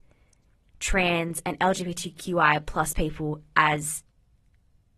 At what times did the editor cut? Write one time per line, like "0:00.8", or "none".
none